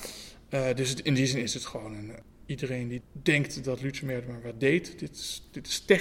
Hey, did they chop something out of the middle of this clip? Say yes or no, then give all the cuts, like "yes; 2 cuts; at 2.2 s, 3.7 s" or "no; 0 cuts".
no; 0 cuts